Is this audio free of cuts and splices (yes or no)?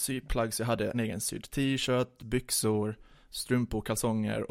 no